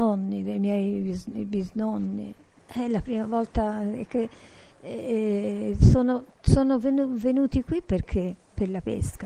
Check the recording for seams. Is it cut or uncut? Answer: uncut